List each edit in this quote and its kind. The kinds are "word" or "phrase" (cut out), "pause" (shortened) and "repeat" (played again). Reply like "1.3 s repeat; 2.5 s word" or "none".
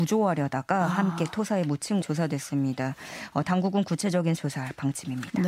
2.0 s word; 4.4 s phrase